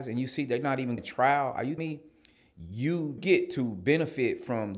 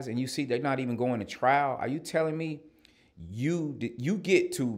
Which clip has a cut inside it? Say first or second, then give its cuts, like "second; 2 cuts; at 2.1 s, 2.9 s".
first; 3 cuts; at 1.0 s, 1.8 s, 3.2 s